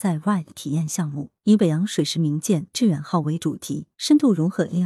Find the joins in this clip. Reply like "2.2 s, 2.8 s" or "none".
1.4 s, 3.9 s

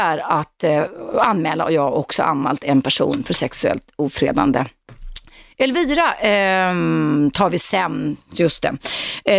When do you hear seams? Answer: none

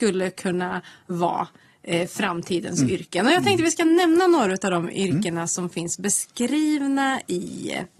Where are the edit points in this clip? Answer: none

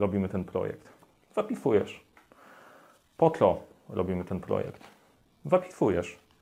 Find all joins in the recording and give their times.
none

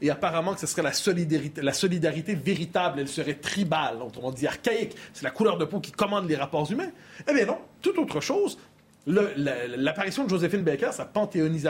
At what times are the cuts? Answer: none

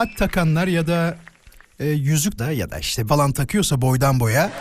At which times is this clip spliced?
2.4 s, 3.1 s

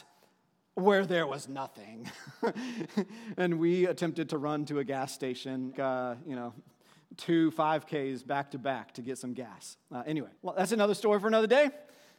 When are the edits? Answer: 5.7 s, 10.4 s

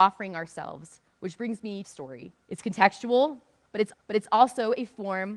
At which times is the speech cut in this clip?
1.1 s, 1.8 s, 2.4 s, 3.9 s

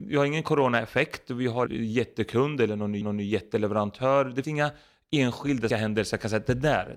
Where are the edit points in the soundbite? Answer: 1.7 s, 3.0 s, 4.4 s, 5.7 s

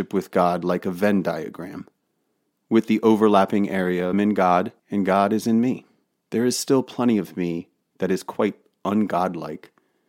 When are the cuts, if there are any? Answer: 4.1 s, 4.8 s, 6.0 s

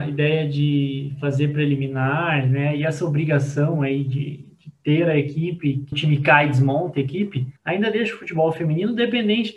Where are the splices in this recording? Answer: 5.9 s, 7.6 s

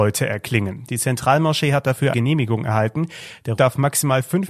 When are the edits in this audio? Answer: 2.1 s, 3.6 s

